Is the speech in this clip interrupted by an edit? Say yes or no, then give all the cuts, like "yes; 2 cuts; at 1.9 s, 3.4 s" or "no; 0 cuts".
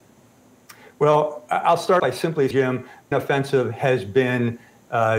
yes; 3 cuts; at 2.0 s, 2.5 s, 3.1 s